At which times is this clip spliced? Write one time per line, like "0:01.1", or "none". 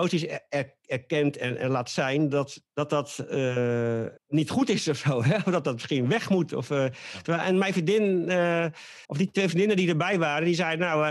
0:01.6
0:02.7
0:04.2
0:09.0